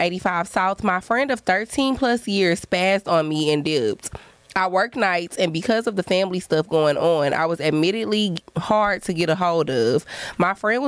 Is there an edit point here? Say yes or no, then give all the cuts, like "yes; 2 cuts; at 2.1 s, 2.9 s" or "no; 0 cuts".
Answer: no; 0 cuts